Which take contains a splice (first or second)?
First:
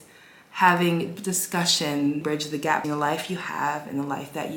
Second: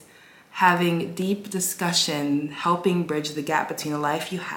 first